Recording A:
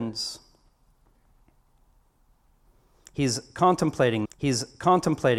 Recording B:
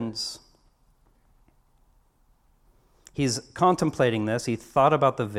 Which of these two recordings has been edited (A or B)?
A